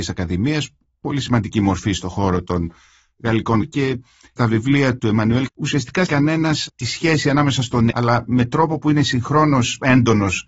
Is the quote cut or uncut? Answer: cut